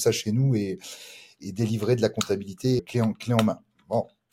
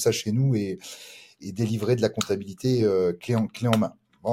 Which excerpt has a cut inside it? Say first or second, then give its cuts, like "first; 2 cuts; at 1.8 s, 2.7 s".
first; 1 cut; at 2.8 s